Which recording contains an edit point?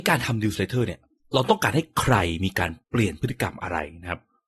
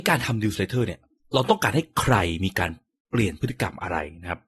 first; 1 cut; at 2.8 s

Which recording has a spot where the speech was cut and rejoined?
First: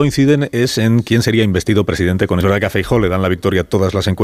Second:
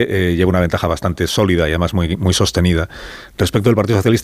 first; 1 cut; at 2.4 s

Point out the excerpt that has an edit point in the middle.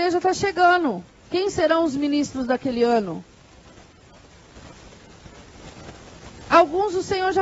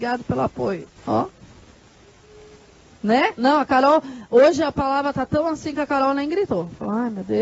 second; 1 cut; at 1.0 s

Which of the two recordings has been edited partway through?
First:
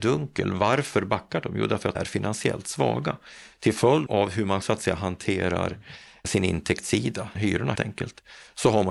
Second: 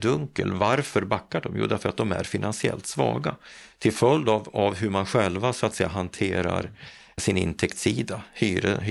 first; 5 cuts; at 2.0 s, 4.1 s, 4.6 s, 7.4 s, 7.8 s

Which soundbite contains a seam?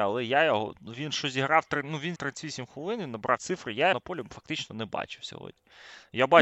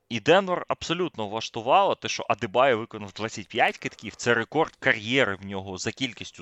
first; 3 cuts; at 2.2 s, 3.4 s, 3.9 s

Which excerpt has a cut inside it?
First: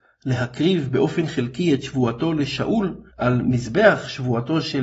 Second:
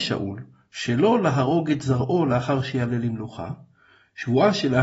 first; 1 cut; at 3.1 s

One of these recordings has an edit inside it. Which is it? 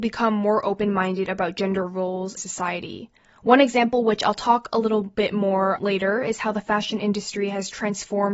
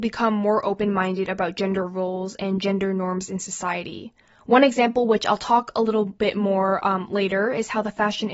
first; 2 cuts; at 2.4 s, 5.8 s

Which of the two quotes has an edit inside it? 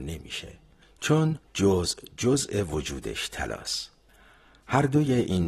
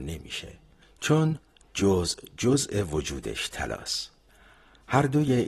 first; 1 cut; at 1.4 s

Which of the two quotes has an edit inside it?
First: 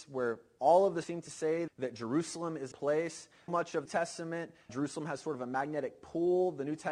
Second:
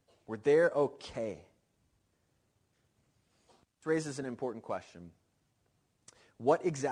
first; 6 cuts; at 1.0 s, 1.7 s, 2.7 s, 3.5 s, 3.9 s, 4.7 s

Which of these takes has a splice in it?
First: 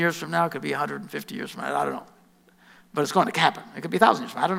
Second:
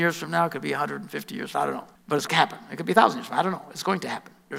second; 3 cuts; at 1.5 s, 2.0 s, 2.3 s

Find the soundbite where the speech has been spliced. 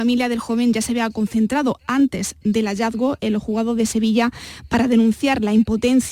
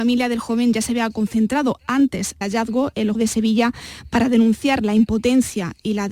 second; 2 cuts; at 2.4 s, 3.1 s

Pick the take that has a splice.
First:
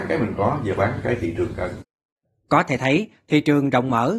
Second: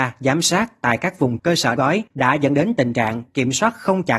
second; 3 cuts; at 1.4 s, 1.8 s, 2.1 s

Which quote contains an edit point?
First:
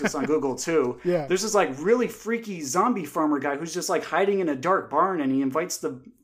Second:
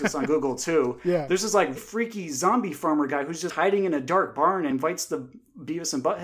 second; 3 cuts; at 1.8 s, 3.5 s, 4.7 s

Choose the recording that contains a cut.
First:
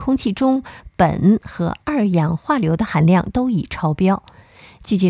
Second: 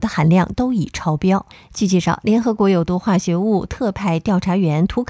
second; 1 cut; at 1.5 s

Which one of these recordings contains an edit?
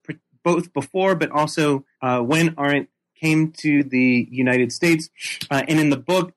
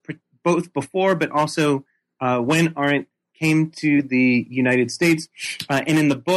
first; 1 cut; at 1.9 s

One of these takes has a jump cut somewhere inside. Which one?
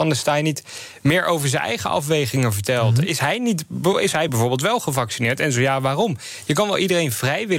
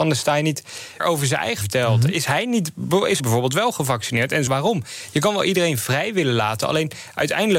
second; 4 cuts; at 1.0 s, 1.6 s, 3.2 s, 4.5 s

